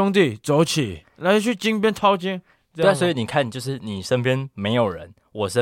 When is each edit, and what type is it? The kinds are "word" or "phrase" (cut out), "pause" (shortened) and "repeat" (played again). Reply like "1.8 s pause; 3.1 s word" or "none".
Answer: none

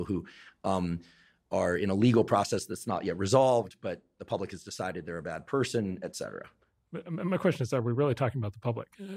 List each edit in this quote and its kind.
none

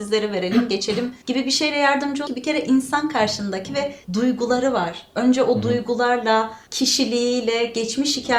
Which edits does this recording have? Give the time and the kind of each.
1.2 s pause; 2.3 s word; 4.0 s pause; 6.7 s pause

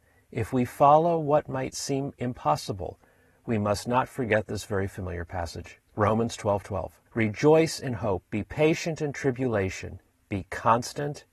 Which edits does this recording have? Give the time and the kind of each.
7.1 s pause

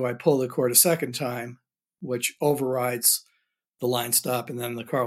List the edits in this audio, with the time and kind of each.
none

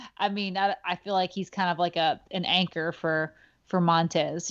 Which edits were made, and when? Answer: none

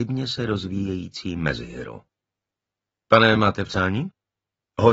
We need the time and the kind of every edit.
none

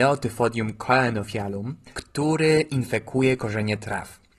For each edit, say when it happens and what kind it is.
1.9 s pause

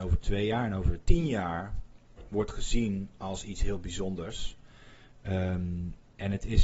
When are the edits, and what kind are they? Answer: none

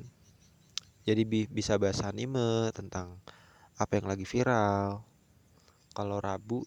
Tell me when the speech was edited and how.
none

